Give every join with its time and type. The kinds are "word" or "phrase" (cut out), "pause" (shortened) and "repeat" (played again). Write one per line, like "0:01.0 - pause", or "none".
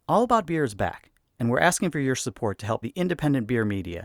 0:02.8 - word

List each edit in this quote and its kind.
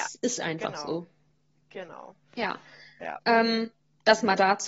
0:02.2 - pause

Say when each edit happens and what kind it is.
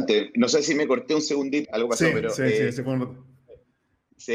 0:01.6 - word

